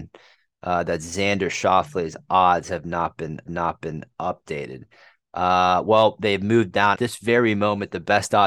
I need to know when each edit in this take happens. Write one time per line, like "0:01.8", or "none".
0:03.5
0:07.0